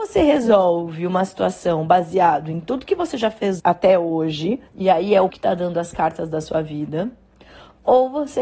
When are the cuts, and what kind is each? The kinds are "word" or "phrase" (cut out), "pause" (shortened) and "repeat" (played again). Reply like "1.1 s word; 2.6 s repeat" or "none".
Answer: 3.6 s word; 4.7 s pause; 5.3 s word

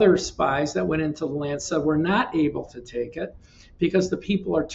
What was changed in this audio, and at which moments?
none

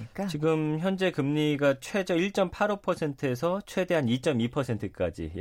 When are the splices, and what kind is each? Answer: none

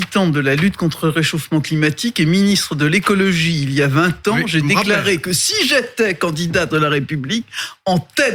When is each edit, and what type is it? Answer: 6.7 s phrase

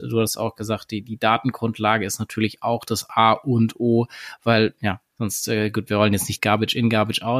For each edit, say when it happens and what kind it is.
5.1 s pause; 5.9 s word; 6.4 s word

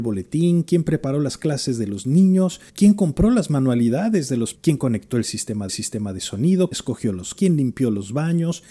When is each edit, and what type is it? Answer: 2.7 s pause; 4.5 s word; 5.7 s repeat; 6.7 s word; 7.3 s word

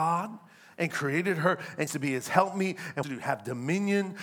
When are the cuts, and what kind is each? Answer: 1.9 s word; 3.0 s phrase

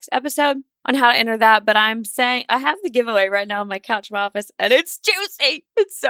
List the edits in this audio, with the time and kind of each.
none

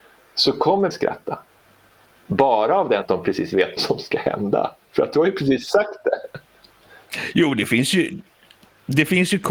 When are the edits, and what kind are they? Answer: 0.9 s word; 3.0 s word; 3.8 s word

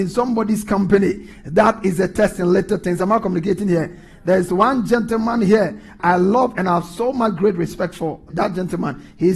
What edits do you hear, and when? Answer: none

